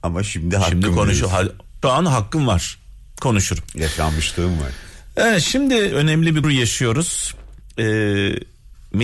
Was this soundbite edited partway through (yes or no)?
yes